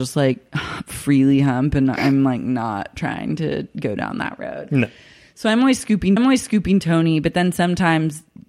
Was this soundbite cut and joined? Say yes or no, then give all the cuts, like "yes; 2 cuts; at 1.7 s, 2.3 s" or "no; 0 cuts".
yes; 1 cut; at 6.2 s